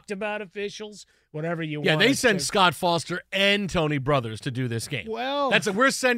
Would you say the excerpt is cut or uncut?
uncut